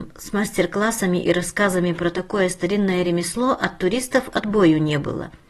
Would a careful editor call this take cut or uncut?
uncut